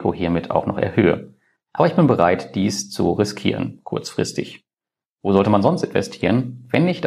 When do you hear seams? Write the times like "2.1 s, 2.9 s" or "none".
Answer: none